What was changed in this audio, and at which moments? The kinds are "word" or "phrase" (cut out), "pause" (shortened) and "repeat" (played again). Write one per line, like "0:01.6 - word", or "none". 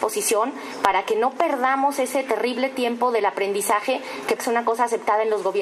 0:04.4 - word